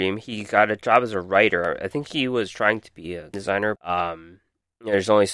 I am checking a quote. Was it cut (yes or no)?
yes